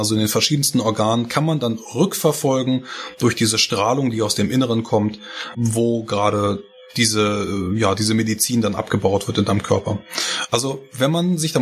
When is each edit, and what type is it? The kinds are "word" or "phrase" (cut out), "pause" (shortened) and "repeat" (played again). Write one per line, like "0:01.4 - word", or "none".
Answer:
0:05.5 - word

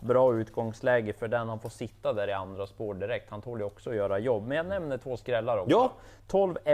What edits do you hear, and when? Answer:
none

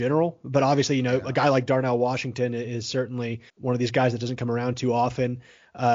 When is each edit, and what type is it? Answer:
0:03.5 - pause

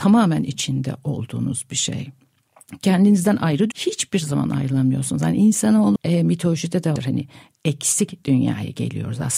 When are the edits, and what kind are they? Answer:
0:03.7 - phrase
0:06.0 - word
0:07.0 - word

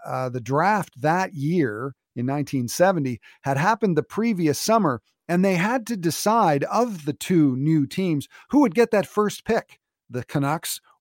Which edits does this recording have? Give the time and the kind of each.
none

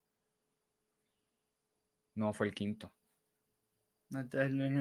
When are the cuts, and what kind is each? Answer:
none

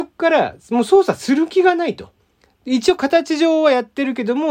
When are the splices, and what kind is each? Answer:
none

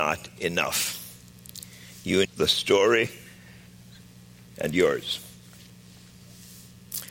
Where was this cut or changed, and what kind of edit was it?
0:02.2 - phrase

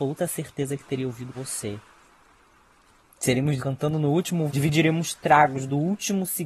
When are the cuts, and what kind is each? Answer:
0:01.3 - word
0:03.6 - word
0:04.5 - word

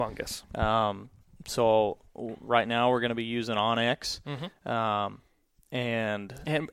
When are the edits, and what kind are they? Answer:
none

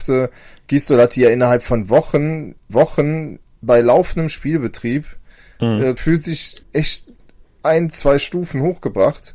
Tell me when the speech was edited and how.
0:02.7 - repeat
0:06.0 - word
0:06.6 - pause

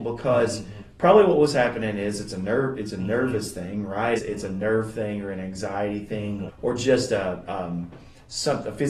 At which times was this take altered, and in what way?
0:04.2 - word
0:06.5 - word

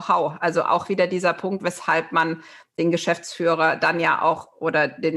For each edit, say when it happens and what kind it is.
none

